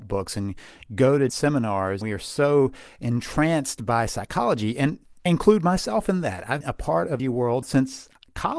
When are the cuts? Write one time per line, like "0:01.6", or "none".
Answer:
0:01.3
0:02.0
0:05.3
0:06.6
0:07.2
0:07.6